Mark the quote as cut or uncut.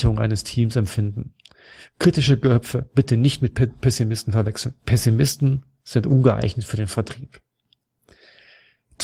uncut